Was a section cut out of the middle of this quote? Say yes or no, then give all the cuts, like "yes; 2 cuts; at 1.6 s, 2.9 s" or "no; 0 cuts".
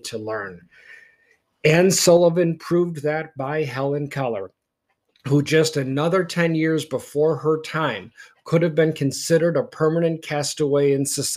no; 0 cuts